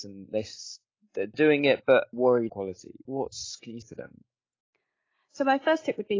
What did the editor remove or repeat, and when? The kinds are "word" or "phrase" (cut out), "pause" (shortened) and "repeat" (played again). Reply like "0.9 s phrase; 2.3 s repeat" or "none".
1.3 s word; 2.1 s word; 2.5 s word; 3.1 s word; 3.8 s word